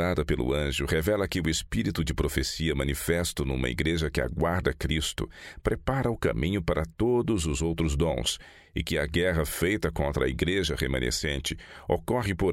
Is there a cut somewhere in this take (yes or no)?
no